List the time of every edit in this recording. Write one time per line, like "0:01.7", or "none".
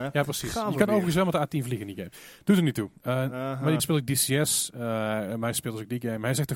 0:03.8

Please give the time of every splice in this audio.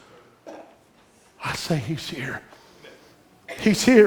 none

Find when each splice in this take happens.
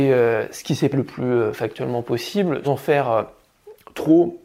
0:00.9
0:02.6

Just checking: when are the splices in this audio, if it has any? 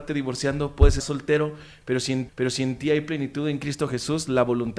0:01.0
0:02.3

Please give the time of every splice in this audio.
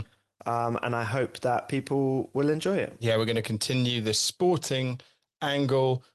none

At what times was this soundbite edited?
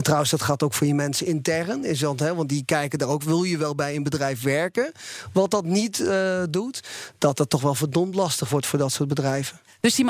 none

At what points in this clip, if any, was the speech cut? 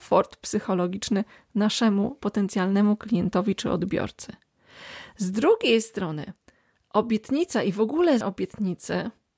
0:08.2

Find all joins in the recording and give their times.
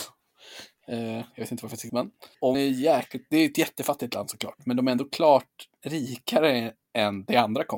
0:01.9
0:02.5

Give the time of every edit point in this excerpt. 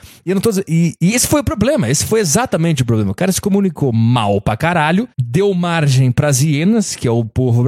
0:05.1

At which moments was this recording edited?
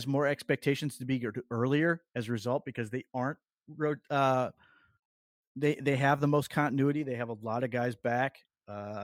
none

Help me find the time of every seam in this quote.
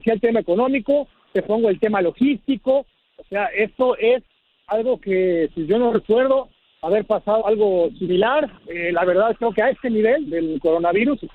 0:07.4
0:08.6
0:10.3

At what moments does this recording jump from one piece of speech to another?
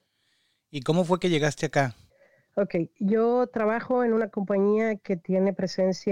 0:02.1

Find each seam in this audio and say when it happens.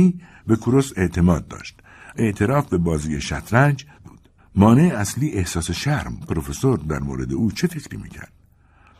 0:02.1
0:04.0
0:04.4
0:06.2

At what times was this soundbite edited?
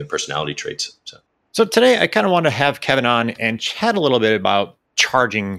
none

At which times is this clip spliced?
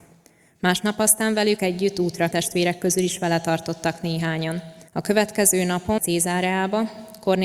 0:02.3
0:04.9
0:06.0

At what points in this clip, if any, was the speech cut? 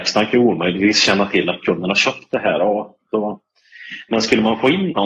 none

